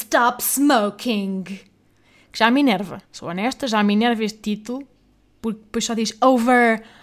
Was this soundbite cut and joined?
yes; 1 cut; at 3.1 s

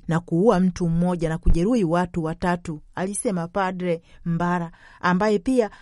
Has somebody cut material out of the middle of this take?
no; 0 cuts

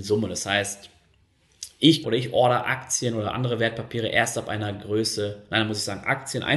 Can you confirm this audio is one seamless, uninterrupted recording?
no; 1 cut; at 2.0 s

